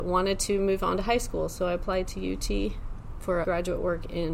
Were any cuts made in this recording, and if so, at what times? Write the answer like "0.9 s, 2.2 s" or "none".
3.4 s